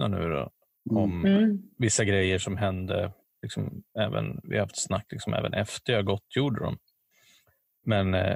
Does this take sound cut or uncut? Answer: uncut